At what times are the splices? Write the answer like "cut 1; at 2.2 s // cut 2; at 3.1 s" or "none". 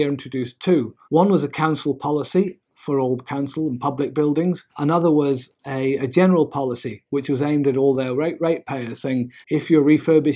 cut 1; at 1.0 s // cut 2; at 4.7 s // cut 3; at 9.4 s